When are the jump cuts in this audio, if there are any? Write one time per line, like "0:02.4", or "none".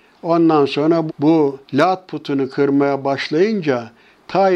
0:01.1
0:01.6